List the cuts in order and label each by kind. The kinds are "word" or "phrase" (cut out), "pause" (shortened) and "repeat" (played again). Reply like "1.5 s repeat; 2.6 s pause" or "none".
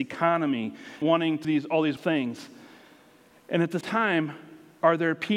1.0 s word; 1.4 s word; 2.0 s word; 3.8 s word